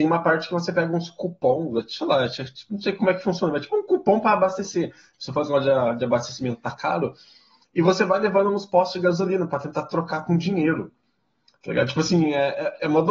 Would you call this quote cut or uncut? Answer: uncut